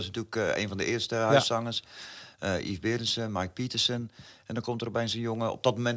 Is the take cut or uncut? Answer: uncut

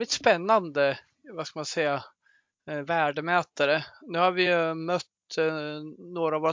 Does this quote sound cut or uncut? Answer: uncut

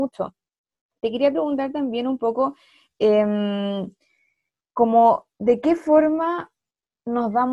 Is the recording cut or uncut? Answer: uncut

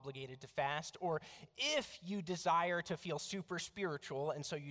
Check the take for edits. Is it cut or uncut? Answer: uncut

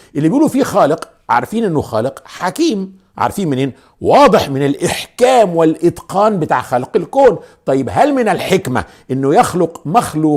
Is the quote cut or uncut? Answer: uncut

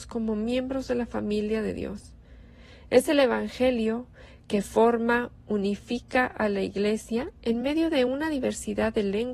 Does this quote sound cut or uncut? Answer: uncut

